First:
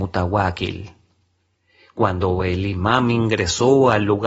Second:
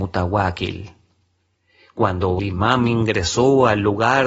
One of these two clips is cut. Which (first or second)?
second